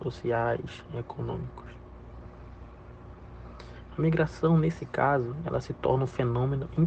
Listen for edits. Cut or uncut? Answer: uncut